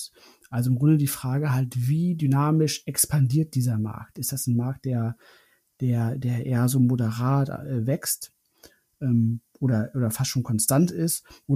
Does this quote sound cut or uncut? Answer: uncut